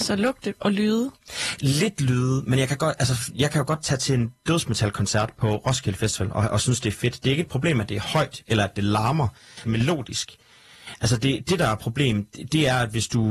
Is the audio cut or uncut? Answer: cut